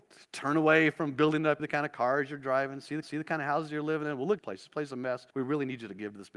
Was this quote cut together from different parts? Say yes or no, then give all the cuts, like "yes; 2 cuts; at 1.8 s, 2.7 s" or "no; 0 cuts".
yes; 4 cuts; at 1.6 s, 3.0 s, 4.4 s, 5.3 s